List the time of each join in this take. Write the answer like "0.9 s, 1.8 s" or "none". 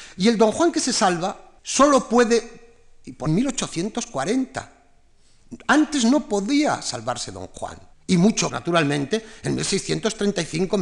1.6 s, 3.3 s, 7.9 s, 8.5 s

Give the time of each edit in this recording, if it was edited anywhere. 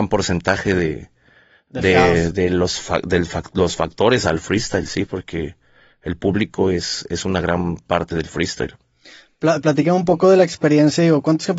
2.3 s

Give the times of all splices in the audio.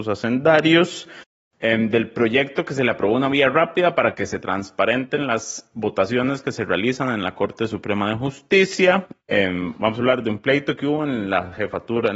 none

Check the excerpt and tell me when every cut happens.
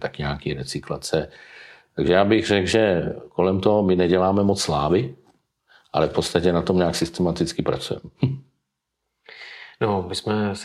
none

